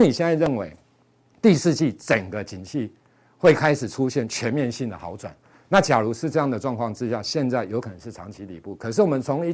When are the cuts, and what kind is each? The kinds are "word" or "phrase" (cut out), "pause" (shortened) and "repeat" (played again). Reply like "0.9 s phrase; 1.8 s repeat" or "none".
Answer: none